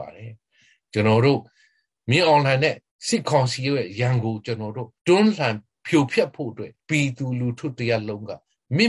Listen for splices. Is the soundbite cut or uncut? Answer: cut